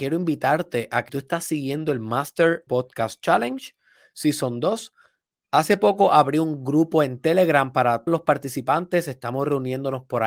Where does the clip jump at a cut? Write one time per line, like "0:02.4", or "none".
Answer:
0:01.1
0:02.7
0:08.1